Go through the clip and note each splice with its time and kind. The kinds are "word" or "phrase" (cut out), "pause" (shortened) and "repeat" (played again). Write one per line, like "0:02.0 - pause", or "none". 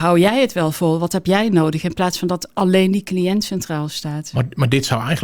none